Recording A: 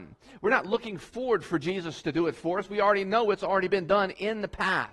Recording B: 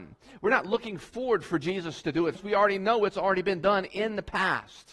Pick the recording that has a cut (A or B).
B